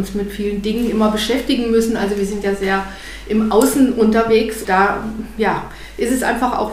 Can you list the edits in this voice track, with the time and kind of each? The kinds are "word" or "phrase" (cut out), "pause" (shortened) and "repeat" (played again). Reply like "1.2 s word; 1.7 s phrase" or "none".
4.6 s word